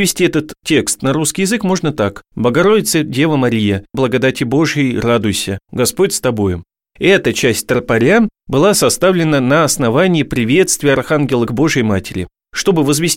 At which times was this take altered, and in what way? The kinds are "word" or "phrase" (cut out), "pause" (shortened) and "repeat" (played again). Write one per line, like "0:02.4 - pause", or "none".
0:02.3 - pause
0:03.9 - word
0:11.5 - word